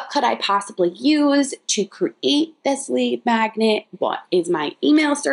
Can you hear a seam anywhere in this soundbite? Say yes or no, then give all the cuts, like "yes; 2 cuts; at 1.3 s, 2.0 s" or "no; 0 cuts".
no; 0 cuts